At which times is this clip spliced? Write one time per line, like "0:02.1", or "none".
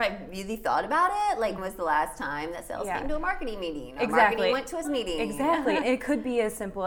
0:01.6
0:04.8
0:05.8